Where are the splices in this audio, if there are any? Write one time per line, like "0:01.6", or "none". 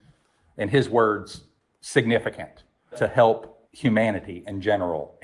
0:02.9
0:03.6